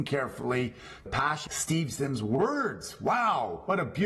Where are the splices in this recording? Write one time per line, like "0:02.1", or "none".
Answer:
0:01.1
0:01.5